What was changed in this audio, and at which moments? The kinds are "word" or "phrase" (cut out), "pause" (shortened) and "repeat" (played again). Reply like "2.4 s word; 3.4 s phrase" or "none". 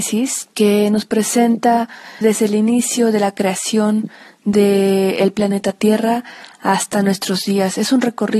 2.2 s word

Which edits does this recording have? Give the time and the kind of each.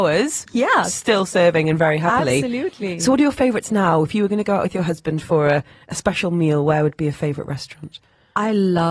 none

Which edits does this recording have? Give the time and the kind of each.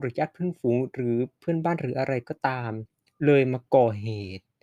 none

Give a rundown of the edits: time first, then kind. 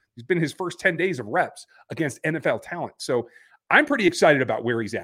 none

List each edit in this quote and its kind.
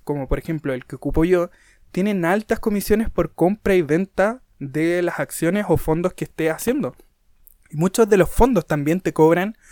none

